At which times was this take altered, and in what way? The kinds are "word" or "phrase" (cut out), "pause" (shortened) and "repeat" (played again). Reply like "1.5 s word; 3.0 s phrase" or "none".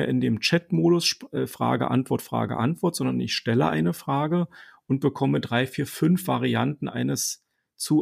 none

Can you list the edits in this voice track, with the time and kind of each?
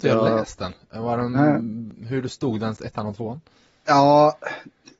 2.8 s phrase

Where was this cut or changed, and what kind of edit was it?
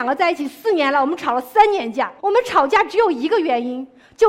2.2 s pause

